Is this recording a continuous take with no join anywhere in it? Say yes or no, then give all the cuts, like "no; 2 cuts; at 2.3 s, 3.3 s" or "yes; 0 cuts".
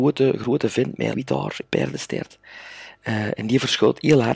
no; 2 cuts; at 1.1 s, 1.6 s